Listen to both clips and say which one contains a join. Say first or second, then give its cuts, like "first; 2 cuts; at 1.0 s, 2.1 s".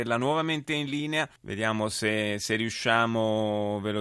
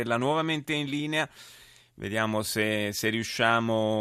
first; 1 cut; at 1.4 s